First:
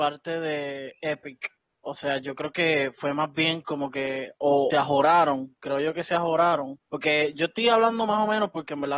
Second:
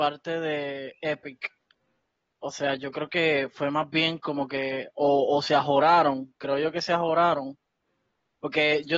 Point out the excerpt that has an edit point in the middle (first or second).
first